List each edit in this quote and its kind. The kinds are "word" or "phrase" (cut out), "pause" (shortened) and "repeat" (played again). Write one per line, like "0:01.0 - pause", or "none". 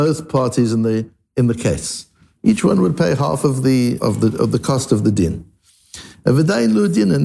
0:04.0 - word